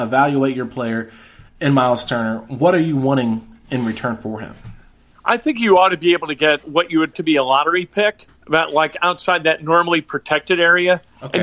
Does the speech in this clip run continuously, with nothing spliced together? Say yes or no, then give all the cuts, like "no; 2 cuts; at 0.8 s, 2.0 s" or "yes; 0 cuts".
no; 3 cuts; at 6.6 s, 7.1 s, 8.4 s